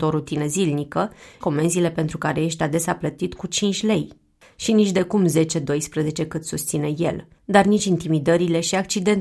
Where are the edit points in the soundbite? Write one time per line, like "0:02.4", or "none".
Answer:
0:01.4
0:07.4